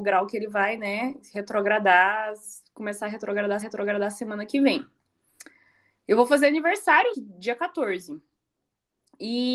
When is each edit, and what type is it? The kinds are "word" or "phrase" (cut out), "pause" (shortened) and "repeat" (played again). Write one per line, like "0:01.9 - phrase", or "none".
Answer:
0:03.6 - repeat
0:07.1 - word